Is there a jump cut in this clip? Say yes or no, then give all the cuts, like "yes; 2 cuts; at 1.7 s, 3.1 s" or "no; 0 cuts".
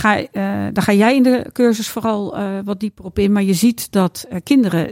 no; 0 cuts